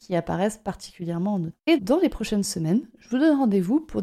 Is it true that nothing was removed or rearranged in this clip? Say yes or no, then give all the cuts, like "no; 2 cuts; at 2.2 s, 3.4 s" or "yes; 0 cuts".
no; 1 cut; at 1.8 s